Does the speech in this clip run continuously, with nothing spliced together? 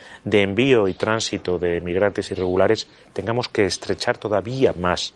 yes; 0 cuts

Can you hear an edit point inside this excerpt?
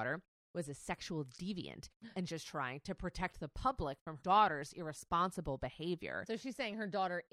yes; 2 cuts; at 2.3 s, 4.2 s

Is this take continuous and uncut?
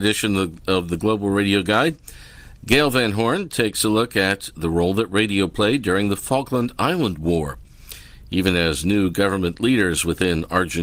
yes; 0 cuts

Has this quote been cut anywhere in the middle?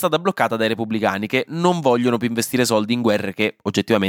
no; 0 cuts

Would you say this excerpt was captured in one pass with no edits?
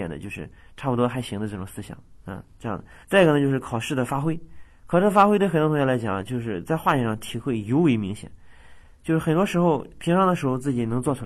no; 1 cut; at 3.0 s

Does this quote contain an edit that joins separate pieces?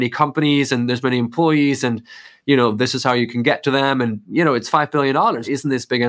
no; 0 cuts

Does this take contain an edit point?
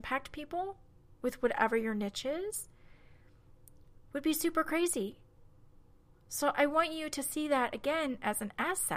no; 0 cuts

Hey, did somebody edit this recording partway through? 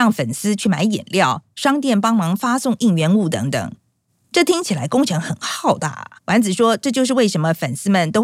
yes; 1 cut; at 6.2 s

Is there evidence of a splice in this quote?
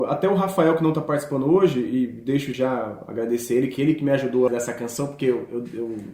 yes; 2 cuts; at 2.5 s, 4.5 s

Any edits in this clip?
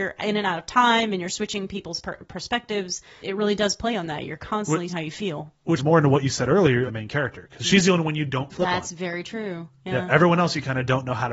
yes; 5 cuts; at 3.2 s, 4.9 s, 5.8 s, 6.9 s, 8.5 s

